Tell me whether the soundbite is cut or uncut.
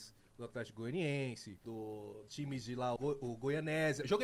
cut